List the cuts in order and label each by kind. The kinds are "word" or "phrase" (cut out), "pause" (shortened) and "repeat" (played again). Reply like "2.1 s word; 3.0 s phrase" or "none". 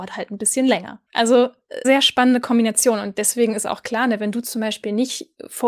1.8 s word